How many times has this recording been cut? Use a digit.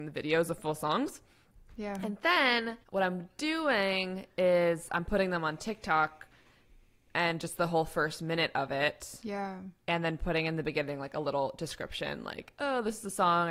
1